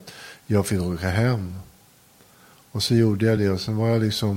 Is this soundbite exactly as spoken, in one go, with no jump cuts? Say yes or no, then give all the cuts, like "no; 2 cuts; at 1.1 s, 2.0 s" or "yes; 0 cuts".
yes; 0 cuts